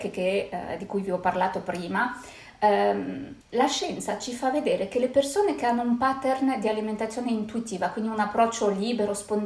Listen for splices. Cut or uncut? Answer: cut